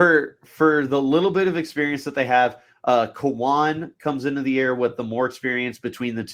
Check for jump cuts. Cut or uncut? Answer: uncut